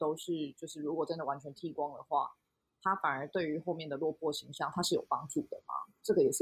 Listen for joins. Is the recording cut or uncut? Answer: uncut